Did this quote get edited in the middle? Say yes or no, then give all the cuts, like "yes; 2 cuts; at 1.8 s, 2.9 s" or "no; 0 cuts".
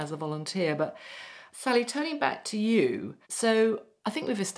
yes; 1 cut; at 3.2 s